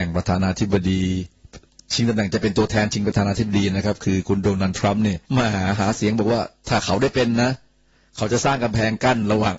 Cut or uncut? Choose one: cut